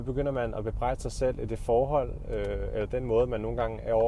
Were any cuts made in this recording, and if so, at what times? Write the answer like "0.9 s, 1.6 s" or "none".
none

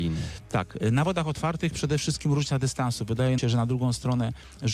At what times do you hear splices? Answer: 3.4 s

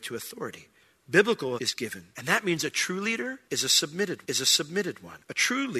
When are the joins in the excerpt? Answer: 1.6 s, 2.1 s, 4.2 s

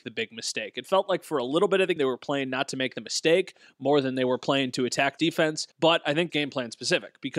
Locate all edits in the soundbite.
2.0 s, 5.2 s, 5.7 s, 6.3 s

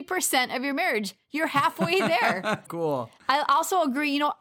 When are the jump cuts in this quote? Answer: 2.7 s

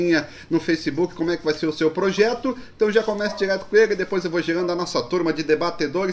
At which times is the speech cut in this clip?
none

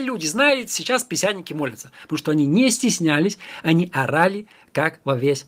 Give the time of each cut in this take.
none

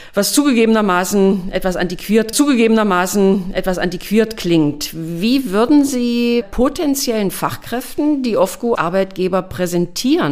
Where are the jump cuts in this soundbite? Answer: 2.3 s, 6.4 s, 8.7 s

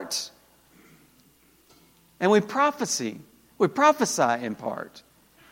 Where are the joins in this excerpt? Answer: none

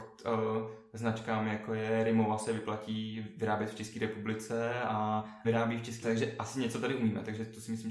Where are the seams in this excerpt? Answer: 5.4 s, 6.0 s

